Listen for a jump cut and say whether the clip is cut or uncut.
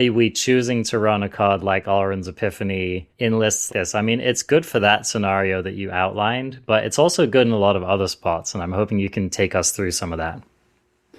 cut